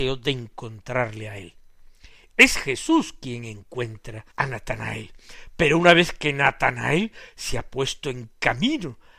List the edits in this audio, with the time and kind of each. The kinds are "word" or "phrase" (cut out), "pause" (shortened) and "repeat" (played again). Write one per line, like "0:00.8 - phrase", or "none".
0:04.3 - pause